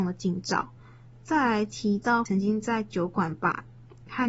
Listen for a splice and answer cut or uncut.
cut